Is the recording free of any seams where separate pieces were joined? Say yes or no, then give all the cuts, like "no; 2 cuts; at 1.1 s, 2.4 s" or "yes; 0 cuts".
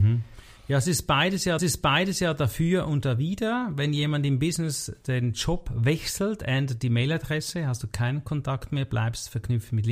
no; 1 cut; at 1.6 s